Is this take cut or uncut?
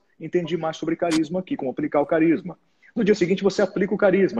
uncut